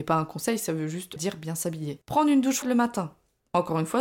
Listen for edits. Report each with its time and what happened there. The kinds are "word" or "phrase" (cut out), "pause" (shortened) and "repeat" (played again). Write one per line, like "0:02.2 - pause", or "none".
0:01.2 - word
0:02.6 - word